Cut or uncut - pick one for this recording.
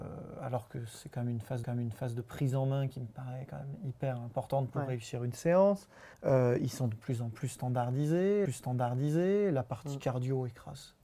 cut